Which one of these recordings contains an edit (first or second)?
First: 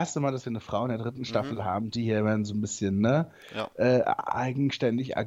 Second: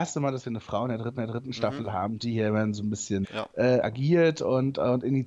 second